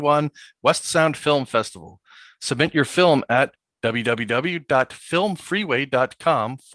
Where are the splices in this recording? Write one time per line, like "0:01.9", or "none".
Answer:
none